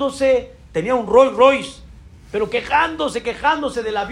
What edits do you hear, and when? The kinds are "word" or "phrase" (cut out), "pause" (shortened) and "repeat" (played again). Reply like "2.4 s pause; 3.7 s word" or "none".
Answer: none